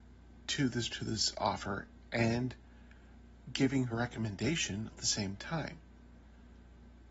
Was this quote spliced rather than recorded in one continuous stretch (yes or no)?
yes